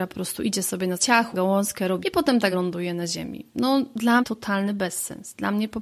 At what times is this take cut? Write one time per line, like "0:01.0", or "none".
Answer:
0:01.0
0:01.3
0:02.0
0:02.5
0:04.2